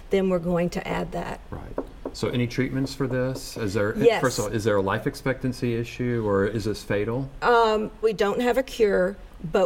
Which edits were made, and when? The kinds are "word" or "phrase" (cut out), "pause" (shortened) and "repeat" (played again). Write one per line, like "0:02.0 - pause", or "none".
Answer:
0:08.0 - word